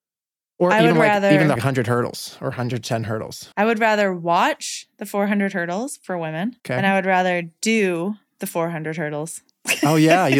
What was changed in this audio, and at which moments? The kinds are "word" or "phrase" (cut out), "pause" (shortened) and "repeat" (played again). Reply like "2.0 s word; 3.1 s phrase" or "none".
1.6 s phrase; 3.5 s pause; 6.6 s pause